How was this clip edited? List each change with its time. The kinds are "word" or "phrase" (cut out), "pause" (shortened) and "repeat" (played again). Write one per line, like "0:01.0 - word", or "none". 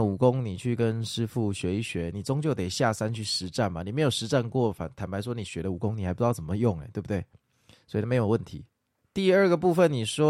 none